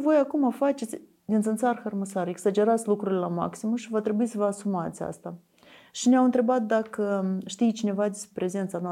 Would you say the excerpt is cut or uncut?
uncut